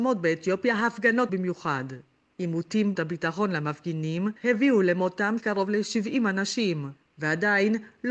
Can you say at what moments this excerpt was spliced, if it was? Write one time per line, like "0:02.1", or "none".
0:01.3
0:02.9
0:04.4
0:05.4